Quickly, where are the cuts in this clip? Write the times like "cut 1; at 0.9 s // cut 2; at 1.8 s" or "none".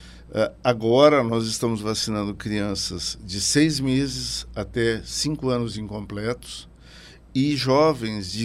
none